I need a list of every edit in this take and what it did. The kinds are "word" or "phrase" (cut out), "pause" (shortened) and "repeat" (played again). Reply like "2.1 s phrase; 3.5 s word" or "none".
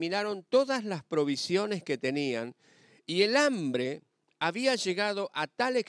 none